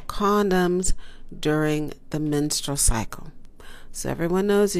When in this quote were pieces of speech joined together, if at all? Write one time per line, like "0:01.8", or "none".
none